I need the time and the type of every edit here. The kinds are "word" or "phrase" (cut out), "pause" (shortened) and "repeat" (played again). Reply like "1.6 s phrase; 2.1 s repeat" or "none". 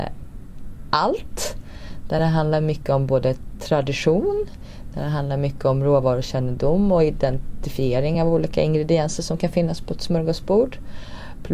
none